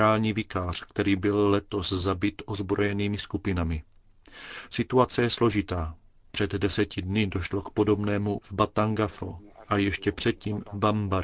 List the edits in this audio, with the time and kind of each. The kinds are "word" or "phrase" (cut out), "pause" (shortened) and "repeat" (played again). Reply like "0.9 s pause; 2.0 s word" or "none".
8.4 s word